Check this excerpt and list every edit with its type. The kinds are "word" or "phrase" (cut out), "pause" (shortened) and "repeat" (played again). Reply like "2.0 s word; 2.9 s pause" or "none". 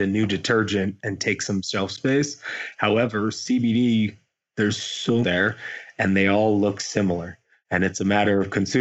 5.2 s phrase